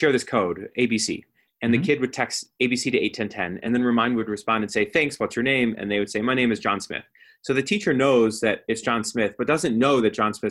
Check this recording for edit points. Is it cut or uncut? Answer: uncut